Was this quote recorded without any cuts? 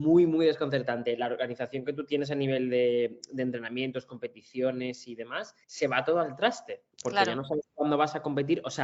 no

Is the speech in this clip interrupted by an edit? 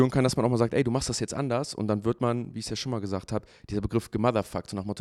no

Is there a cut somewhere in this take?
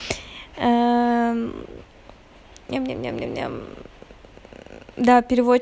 no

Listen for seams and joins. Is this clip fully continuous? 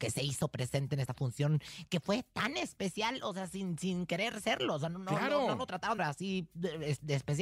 no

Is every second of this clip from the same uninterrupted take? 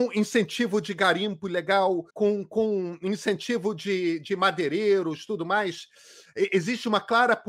no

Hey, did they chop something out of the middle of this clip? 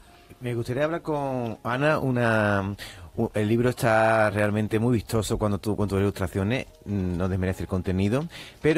no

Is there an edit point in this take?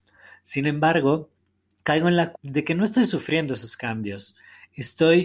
yes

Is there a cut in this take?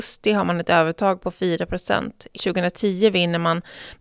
yes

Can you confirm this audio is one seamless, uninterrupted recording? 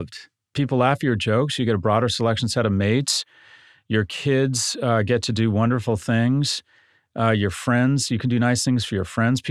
yes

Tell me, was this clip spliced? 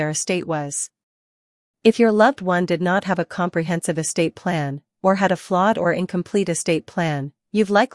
no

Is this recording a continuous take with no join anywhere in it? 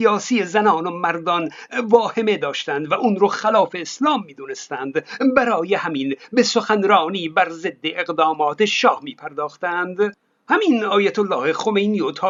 yes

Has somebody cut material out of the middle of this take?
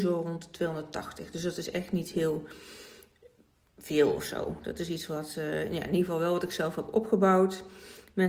no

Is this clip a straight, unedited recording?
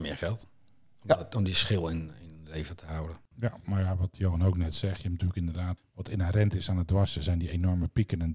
no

